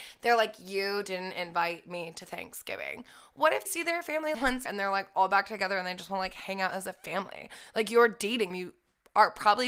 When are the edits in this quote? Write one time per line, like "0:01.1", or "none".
0:03.7
0:04.3
0:04.7
0:08.5